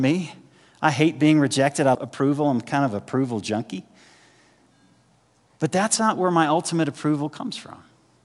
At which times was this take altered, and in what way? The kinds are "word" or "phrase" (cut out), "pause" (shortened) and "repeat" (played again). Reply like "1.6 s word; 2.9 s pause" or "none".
1.9 s word